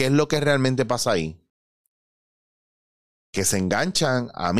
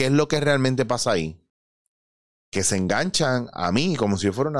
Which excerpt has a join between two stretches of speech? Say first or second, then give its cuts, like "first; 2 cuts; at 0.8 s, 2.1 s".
second; 1 cut; at 2.2 s